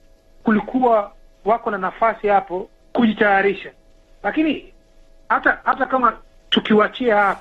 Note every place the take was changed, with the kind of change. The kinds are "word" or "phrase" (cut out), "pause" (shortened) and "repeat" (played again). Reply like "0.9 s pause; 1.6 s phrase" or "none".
5.6 s word